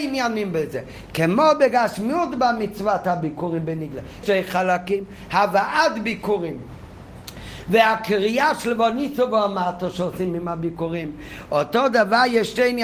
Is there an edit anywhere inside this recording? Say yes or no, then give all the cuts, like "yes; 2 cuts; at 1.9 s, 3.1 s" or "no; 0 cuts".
yes; 1 cut; at 4.2 s